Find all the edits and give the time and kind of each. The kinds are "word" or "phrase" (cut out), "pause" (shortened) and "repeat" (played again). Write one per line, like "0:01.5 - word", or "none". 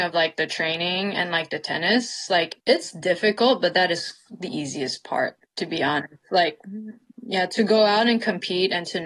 0:02.6 - pause
0:05.4 - pause